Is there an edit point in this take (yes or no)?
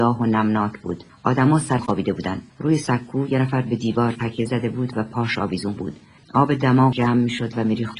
yes